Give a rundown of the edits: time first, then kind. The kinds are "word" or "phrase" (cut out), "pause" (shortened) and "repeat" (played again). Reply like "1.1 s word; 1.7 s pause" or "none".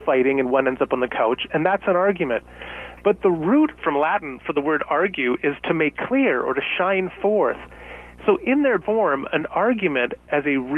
3.8 s word; 8.8 s word